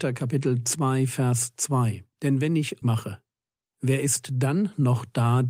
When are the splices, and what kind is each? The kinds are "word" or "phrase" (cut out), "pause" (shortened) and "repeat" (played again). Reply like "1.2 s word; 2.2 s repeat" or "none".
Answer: 2.1 s pause; 2.8 s phrase